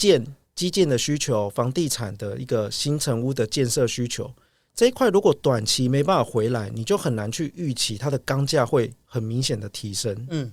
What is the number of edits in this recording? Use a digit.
0